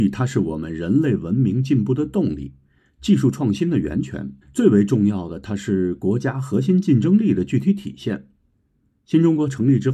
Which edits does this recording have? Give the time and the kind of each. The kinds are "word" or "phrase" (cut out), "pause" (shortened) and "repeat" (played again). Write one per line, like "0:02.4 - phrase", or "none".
0:04.4 - pause

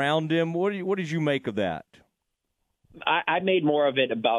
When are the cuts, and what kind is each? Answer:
none

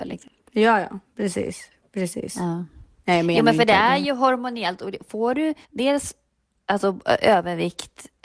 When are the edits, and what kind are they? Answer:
0:05.6 - pause

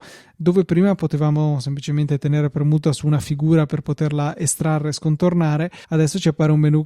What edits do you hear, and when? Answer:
0:05.8 - pause

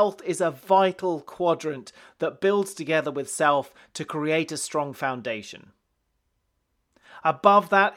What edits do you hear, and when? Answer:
none

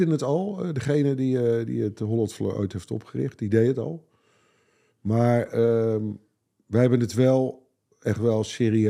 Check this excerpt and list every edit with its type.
none

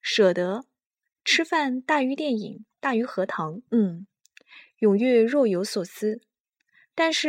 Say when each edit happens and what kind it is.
0:01.0 - pause
0:03.7 - pause

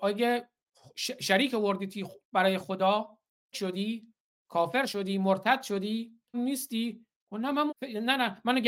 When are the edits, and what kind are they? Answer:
0:03.5 - word
0:06.3 - word
0:07.7 - word

